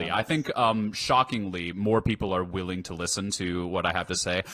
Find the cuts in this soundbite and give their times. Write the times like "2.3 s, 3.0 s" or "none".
none

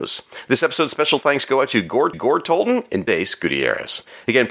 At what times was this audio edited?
2.1 s, 3.1 s

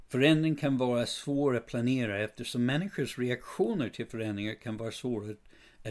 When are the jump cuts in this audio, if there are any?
none

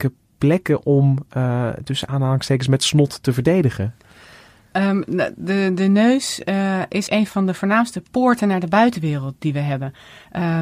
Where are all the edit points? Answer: 7.1 s

